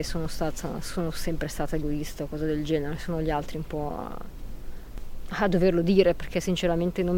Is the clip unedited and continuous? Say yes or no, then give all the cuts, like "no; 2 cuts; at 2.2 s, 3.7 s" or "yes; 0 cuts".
yes; 0 cuts